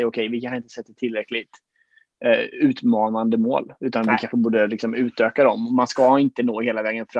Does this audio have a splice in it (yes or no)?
no